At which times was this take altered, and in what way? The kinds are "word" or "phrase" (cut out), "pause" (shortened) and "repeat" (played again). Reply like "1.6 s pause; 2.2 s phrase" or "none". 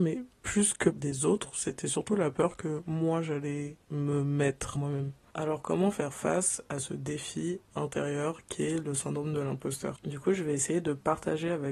0.9 s phrase; 3.8 s pause; 4.8 s word